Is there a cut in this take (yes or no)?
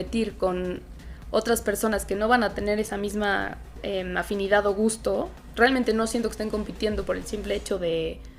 no